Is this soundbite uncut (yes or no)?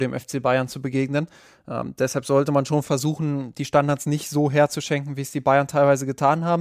yes